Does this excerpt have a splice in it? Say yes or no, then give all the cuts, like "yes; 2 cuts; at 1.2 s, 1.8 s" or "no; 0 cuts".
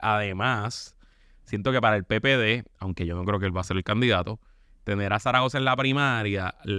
no; 0 cuts